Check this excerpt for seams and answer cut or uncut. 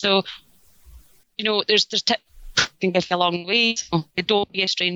uncut